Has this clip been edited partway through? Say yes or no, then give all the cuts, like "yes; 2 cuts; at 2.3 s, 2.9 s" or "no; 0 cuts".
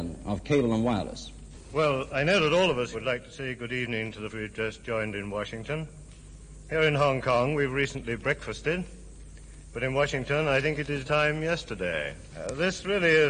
yes; 3 cuts; at 2.9 s, 4.3 s, 11.0 s